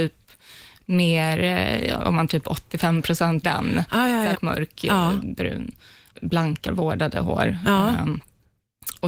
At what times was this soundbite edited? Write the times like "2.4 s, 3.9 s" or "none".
2.3 s, 3.4 s, 4.3 s, 6.7 s